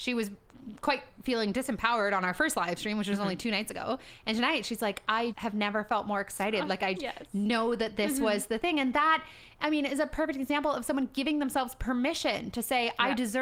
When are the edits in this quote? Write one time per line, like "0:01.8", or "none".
0:05.3
0:07.0